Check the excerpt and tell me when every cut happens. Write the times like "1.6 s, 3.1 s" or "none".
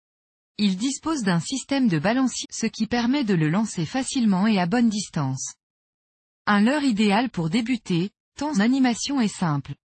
2.4 s, 8.5 s